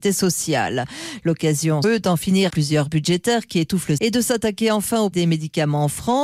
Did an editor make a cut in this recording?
yes; 5 cuts; at 1.8 s, 2.5 s, 2.9 s, 4.0 s, 5.1 s

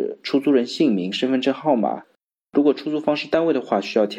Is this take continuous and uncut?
yes; 0 cuts

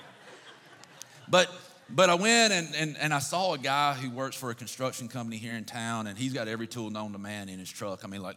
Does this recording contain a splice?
no; 0 cuts

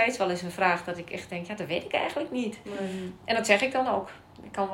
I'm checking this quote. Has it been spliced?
no; 0 cuts

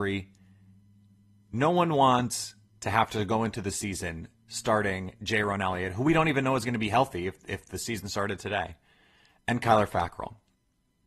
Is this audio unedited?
yes; 0 cuts

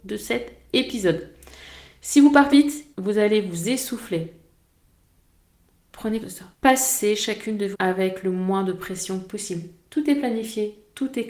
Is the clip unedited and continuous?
no; 5 cuts; at 2.5 s, 2.9 s, 6.2 s, 6.5 s, 7.7 s

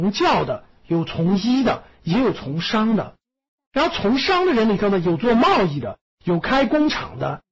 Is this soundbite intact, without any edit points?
yes; 0 cuts

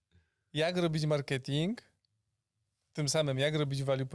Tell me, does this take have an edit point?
no; 0 cuts

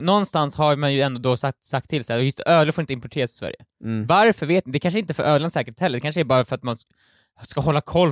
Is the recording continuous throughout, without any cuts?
yes; 0 cuts

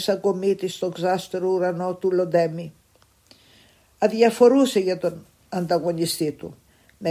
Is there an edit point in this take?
no; 0 cuts

